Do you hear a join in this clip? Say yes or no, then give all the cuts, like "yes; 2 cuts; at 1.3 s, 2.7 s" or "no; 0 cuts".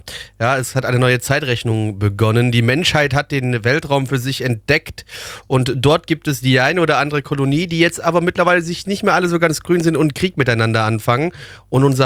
no; 0 cuts